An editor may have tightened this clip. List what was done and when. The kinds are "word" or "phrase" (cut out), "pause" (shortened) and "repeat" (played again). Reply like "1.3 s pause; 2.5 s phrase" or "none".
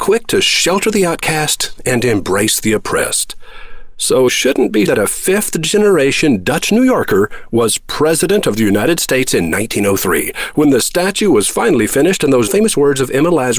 4.3 s word; 4.9 s phrase; 12.5 s word